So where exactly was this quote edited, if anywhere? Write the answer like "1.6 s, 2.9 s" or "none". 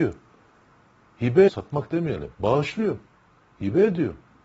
1.5 s, 2.3 s